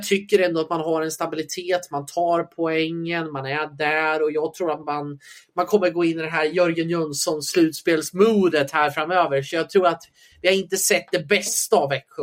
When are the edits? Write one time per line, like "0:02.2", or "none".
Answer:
none